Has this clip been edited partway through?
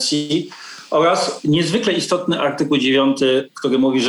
no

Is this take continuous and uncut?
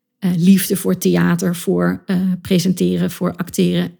yes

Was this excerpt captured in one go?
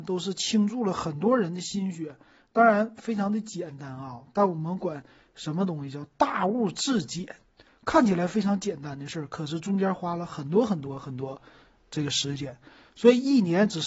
yes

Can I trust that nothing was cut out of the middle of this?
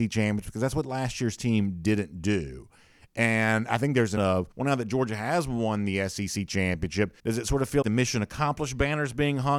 no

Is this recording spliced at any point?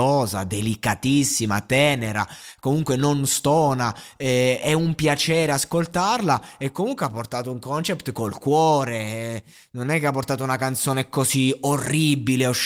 no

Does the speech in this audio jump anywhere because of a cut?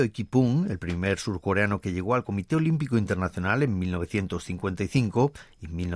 no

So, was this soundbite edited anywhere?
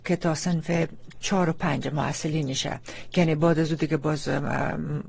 no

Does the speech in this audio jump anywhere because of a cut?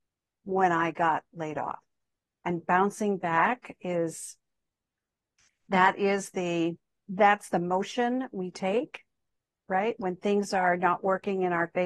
no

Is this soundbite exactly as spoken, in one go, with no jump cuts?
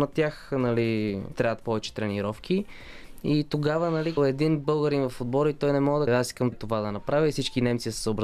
no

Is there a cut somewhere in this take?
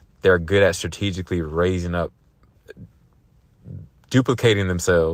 no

